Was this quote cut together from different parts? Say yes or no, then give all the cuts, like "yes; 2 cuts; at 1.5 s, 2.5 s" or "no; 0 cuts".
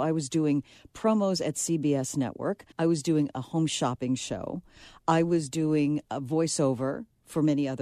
yes; 1 cut; at 2.7 s